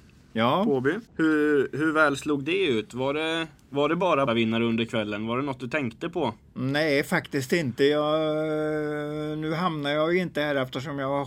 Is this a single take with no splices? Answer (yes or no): no